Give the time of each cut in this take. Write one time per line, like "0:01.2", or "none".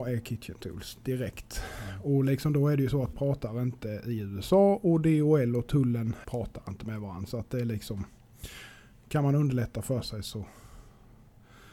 0:03.1
0:06.2